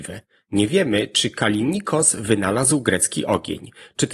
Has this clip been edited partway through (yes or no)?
no